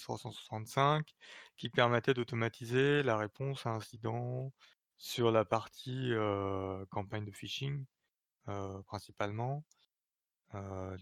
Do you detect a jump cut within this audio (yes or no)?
no